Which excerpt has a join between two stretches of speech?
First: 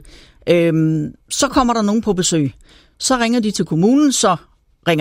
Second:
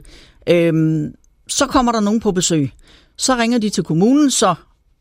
first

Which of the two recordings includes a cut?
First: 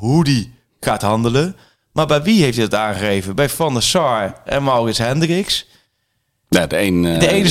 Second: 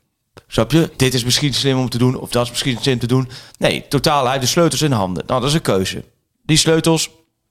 second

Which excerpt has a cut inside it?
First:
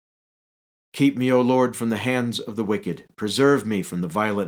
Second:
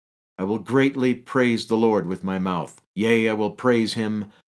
second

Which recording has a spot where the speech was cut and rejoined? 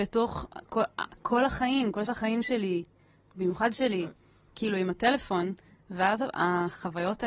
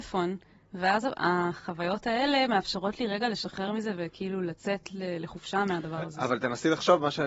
first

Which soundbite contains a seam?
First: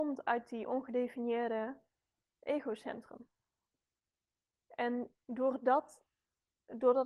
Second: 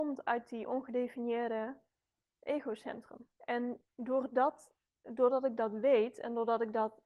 second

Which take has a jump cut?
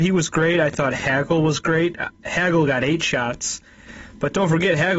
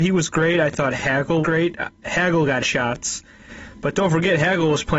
second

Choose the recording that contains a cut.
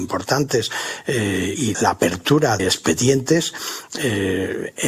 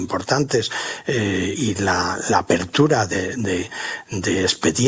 first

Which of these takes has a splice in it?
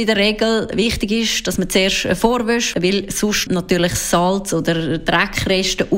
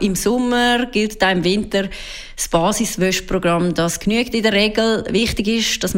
first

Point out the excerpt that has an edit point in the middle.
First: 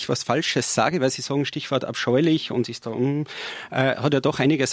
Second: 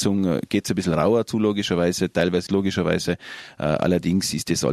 second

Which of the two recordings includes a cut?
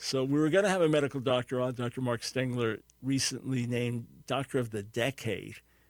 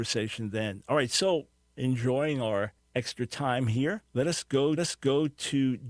second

